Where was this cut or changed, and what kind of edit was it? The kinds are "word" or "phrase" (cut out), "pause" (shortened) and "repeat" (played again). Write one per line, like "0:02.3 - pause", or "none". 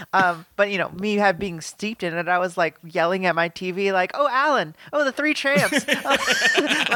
none